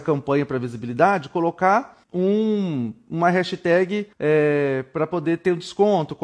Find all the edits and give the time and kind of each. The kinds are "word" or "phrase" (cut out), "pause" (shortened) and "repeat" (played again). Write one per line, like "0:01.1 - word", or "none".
0:02.0 - pause
0:04.1 - pause